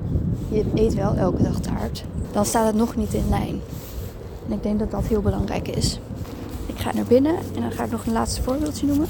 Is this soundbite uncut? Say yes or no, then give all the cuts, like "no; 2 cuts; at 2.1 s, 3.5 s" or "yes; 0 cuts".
no; 1 cut; at 6.9 s